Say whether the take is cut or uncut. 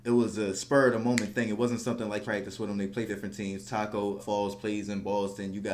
cut